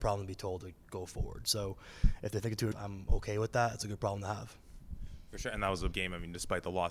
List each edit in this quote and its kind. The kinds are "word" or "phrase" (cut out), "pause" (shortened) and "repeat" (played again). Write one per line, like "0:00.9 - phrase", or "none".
0:02.7 - word
0:05.9 - word